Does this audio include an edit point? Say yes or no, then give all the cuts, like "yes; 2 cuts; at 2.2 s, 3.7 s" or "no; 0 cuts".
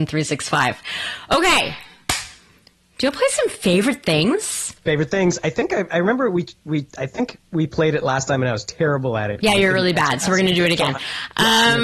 yes; 1 cut; at 4.8 s